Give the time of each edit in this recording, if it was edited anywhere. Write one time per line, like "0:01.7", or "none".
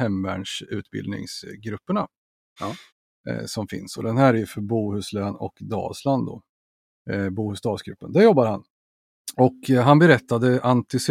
none